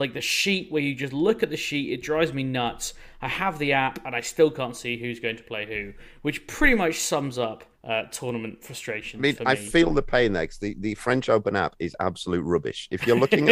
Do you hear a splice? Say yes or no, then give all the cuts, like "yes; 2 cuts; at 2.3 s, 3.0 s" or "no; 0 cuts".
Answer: yes; 1 cut; at 7.7 s